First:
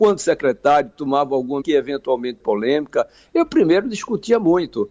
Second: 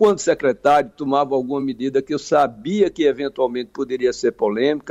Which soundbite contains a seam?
first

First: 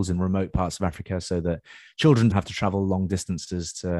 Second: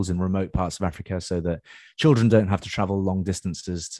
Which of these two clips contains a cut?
first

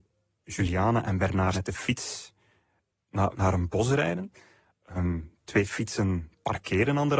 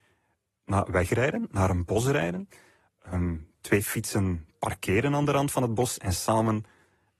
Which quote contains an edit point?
first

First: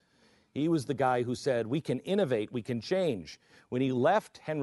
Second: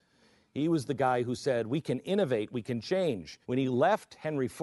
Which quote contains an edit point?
second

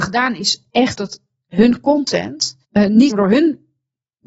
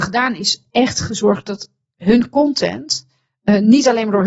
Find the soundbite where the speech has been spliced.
first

